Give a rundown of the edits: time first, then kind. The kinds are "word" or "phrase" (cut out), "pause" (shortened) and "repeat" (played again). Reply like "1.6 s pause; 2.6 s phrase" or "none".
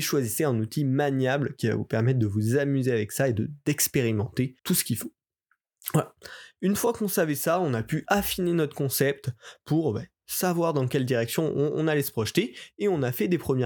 4.6 s pause